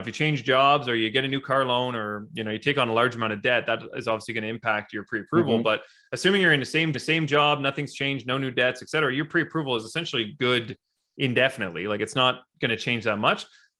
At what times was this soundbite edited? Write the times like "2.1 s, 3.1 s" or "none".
6.9 s